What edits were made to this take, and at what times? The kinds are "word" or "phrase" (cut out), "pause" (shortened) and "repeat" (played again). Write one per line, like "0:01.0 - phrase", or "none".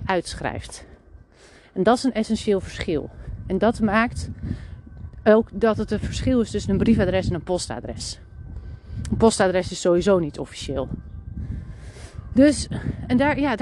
none